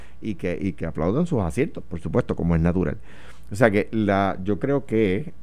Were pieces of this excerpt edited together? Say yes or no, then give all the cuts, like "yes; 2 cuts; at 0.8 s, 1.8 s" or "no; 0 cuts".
no; 0 cuts